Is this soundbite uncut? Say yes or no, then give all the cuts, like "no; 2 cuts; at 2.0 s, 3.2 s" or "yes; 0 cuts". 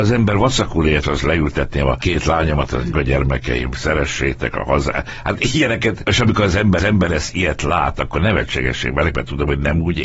no; 3 cuts; at 1.0 s, 2.9 s, 6.8 s